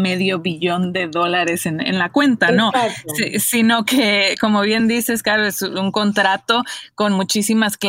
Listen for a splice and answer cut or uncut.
uncut